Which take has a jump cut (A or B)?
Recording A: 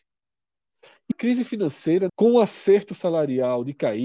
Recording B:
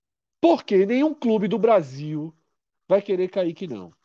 A